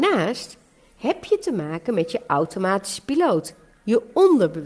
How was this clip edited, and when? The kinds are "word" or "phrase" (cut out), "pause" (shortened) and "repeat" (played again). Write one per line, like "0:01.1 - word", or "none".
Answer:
none